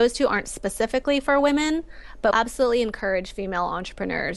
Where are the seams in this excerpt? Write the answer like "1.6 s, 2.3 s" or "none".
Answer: 2.3 s